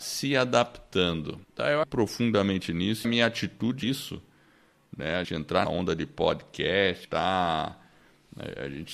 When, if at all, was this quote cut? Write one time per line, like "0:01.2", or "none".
0:01.4
0:01.8
0:03.0
0:03.8
0:05.2
0:05.6
0:07.0